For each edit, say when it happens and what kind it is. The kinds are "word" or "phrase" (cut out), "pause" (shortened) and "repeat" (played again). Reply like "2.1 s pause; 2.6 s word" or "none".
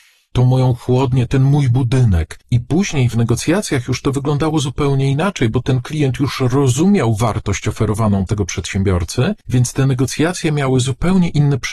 2.4 s pause; 8.3 s word; 9.4 s pause

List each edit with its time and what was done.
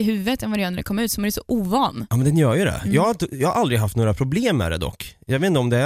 none

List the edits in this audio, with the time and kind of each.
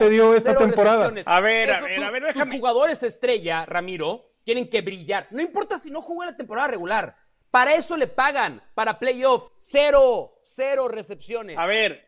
9.5 s pause

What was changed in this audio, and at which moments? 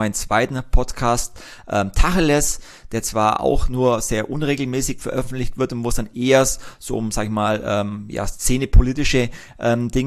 none

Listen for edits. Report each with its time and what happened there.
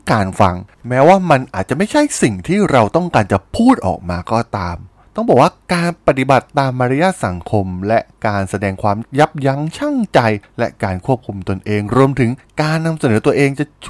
none

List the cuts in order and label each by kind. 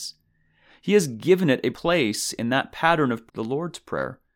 1.7 s word; 3.3 s word

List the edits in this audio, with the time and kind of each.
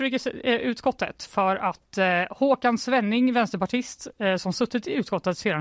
none

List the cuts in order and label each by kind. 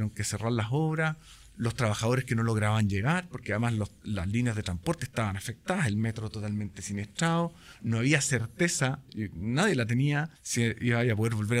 10.3 s pause

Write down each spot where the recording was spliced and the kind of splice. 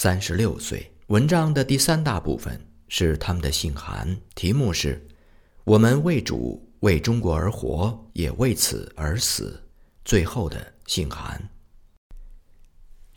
1.0 s pause; 4.3 s pause; 5.1 s pause; 8.1 s pause; 9.7 s pause

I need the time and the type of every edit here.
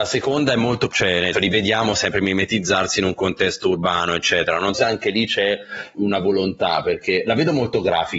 0.9 s word; 1.3 s word; 4.7 s word; 5.9 s word

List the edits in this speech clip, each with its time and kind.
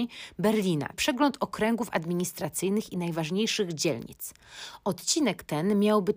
0.9 s word

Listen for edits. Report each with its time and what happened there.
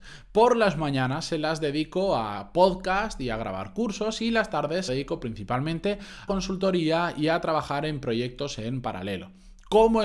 4.9 s phrase; 6.3 s word

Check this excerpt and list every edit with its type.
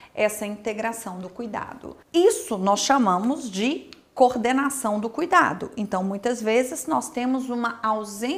2.0 s pause

